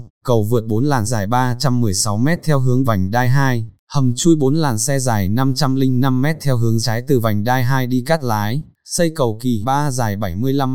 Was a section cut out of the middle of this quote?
yes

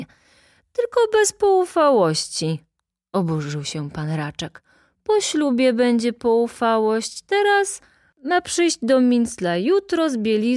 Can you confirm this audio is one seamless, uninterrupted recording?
yes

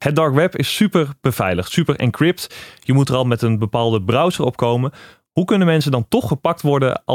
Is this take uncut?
yes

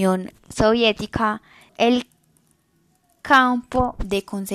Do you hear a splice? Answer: yes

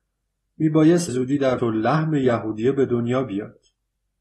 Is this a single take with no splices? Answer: no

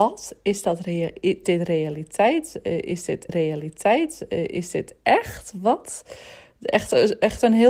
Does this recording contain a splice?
yes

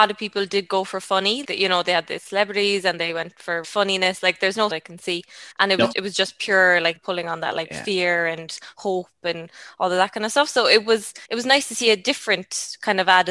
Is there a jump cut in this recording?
yes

